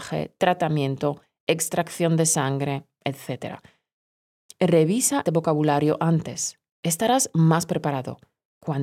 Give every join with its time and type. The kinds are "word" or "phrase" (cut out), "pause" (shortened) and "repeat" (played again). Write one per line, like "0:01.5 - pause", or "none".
0:05.3 - word